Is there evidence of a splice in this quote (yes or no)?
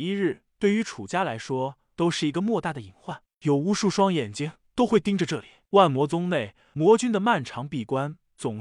no